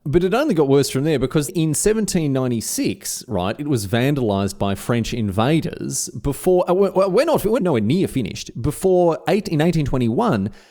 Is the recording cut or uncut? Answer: cut